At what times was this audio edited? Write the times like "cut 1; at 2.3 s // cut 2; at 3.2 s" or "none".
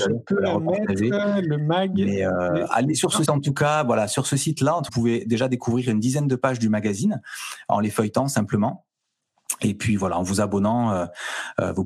cut 1; at 3.3 s // cut 2; at 4.9 s